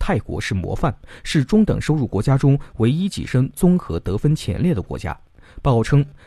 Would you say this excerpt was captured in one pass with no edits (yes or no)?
yes